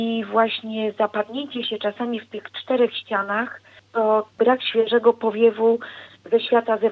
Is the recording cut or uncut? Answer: uncut